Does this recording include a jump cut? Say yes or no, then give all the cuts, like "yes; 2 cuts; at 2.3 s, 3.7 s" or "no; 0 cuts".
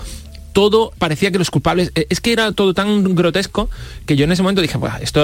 yes; 2 cuts; at 1.0 s, 4.1 s